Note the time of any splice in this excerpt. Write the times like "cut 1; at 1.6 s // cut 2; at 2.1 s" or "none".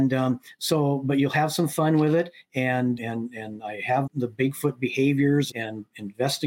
cut 1; at 3.0 s // cut 2; at 4.1 s // cut 3; at 5.5 s